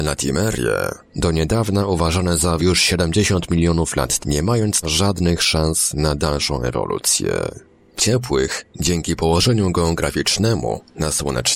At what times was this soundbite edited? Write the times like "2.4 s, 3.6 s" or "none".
2.6 s, 4.2 s, 4.8 s, 8.0 s